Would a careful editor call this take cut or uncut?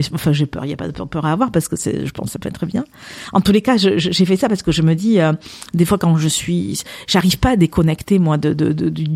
uncut